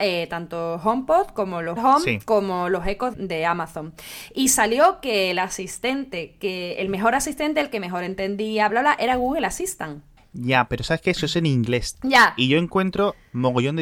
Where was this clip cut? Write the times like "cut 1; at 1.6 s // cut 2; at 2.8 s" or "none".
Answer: cut 1; at 1.8 s // cut 2; at 3.1 s // cut 3; at 8.7 s // cut 4; at 10.2 s